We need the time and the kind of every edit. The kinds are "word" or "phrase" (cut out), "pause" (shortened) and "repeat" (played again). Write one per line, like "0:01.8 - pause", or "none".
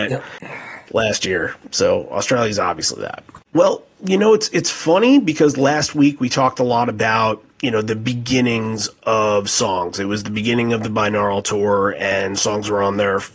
0:03.5 - pause